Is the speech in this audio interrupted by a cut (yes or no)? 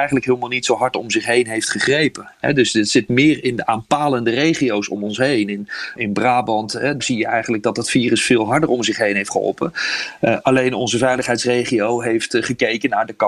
yes